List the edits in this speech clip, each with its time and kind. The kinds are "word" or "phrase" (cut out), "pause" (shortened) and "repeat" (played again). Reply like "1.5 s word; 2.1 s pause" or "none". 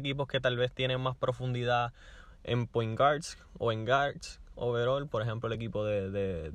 none